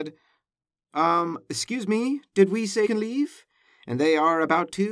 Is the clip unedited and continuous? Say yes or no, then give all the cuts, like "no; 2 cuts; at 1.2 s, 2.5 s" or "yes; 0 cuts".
no; 1 cut; at 2.9 s